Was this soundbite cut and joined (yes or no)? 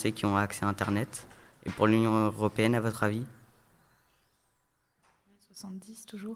no